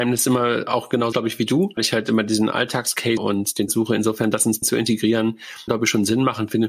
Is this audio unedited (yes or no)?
no